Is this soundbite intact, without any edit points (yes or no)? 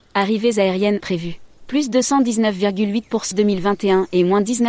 no